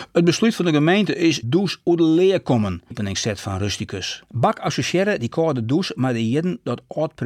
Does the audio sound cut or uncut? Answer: cut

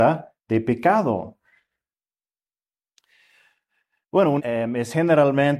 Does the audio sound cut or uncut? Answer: cut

